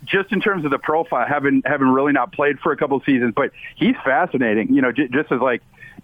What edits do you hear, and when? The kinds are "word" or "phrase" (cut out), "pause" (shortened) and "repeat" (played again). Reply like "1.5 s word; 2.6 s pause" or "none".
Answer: none